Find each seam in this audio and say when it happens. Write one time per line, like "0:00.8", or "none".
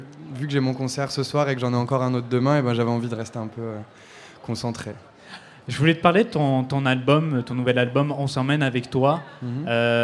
none